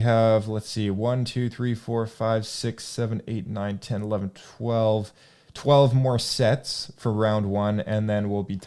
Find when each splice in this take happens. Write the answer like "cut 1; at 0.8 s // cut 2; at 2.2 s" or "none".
none